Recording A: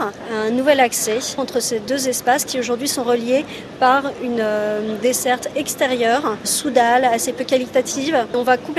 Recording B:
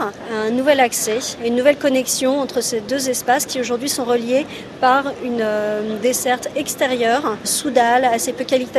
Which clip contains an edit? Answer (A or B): A